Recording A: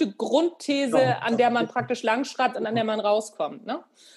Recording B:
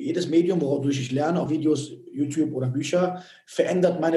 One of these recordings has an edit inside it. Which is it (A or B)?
B